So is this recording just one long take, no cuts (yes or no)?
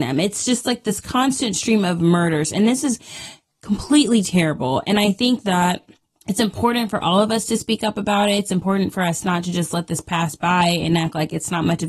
yes